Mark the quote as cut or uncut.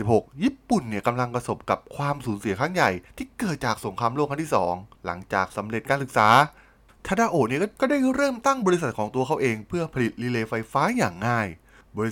uncut